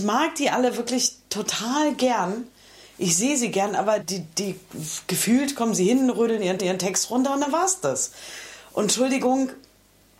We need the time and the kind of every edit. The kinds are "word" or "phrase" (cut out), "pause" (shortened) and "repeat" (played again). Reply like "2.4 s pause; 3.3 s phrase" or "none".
4.0 s word; 6.6 s repeat